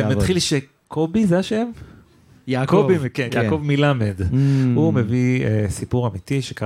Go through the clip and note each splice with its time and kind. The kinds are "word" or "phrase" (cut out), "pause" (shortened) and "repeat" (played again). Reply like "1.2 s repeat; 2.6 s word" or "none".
3.3 s word